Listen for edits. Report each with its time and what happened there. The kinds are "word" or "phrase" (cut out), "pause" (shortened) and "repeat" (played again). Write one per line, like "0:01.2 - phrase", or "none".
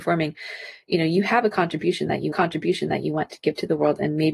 0:02.3 - repeat